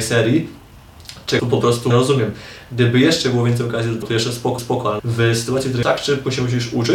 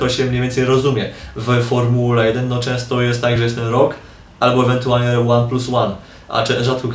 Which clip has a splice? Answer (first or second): first